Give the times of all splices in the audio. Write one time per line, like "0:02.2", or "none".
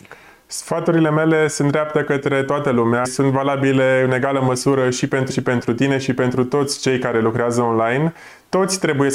0:03.0
0:05.3